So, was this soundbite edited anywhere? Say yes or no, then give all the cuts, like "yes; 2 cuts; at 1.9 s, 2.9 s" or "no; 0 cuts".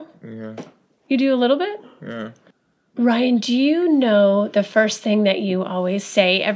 no; 0 cuts